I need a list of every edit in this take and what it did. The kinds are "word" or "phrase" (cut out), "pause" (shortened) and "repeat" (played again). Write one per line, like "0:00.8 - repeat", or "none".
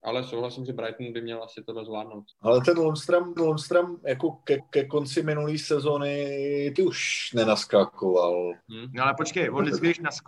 0:02.3 - pause
0:03.4 - repeat
0:04.6 - repeat
0:06.8 - word
0:08.6 - pause

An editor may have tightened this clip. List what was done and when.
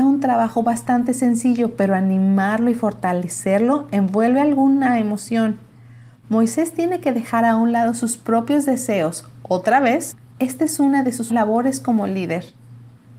0:11.3 - word

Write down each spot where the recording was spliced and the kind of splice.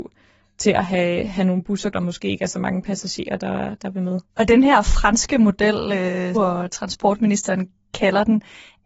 0:01.9 - phrase
0:04.3 - pause
0:06.3 - phrase

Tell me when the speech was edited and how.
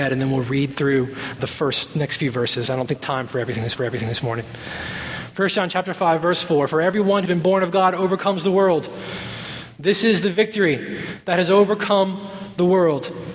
0:01.4 - word
0:03.0 - word
0:03.8 - repeat
0:07.3 - word

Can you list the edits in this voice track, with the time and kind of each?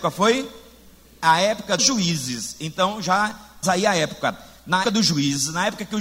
0:01.8 - word
0:03.6 - word
0:04.8 - word

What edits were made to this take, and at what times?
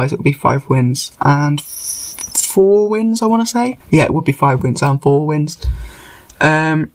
0:03.8 - pause

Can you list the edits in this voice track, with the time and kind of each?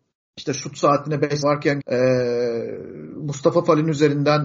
0:01.4 - word
0:01.8 - word

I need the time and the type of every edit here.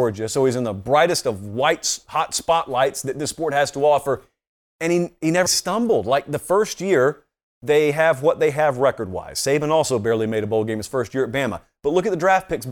0:05.5 - word

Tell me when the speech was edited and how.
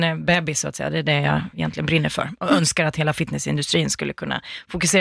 none

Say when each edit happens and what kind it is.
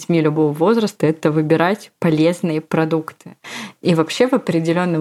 none

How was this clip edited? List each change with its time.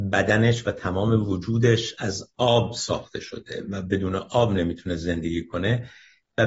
none

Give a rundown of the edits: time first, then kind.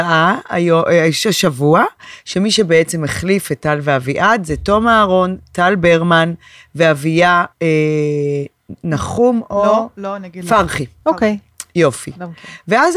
0:07.5 - pause

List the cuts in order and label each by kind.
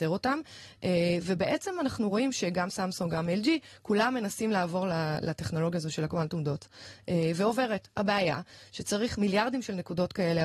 none

